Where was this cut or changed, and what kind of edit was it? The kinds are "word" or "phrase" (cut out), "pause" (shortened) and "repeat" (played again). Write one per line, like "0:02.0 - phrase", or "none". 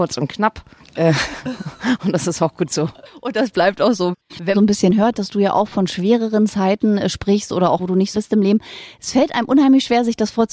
0:04.5 - phrase
0:07.8 - word
0:08.1 - word